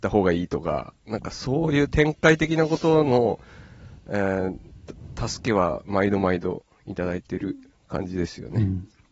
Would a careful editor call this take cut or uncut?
uncut